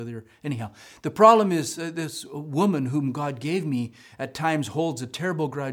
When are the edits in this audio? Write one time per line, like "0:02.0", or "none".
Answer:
none